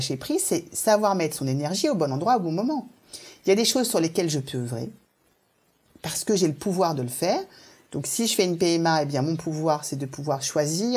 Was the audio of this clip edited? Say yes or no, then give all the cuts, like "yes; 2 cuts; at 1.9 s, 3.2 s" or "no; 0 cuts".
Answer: no; 0 cuts